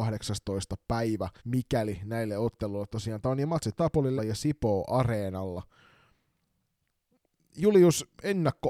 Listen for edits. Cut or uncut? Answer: cut